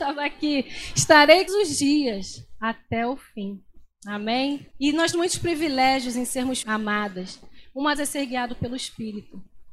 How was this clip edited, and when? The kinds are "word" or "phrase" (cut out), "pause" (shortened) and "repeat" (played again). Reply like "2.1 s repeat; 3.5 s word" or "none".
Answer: 1.5 s phrase; 4.7 s pause; 5.1 s word; 6.6 s word; 7.9 s word